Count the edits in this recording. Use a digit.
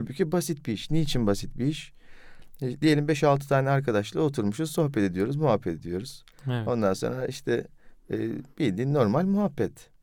1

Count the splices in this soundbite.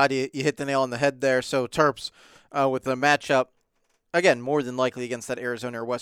0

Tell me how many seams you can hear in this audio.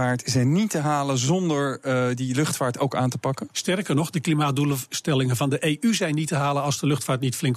0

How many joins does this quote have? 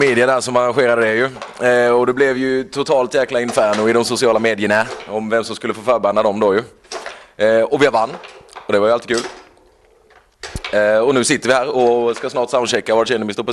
0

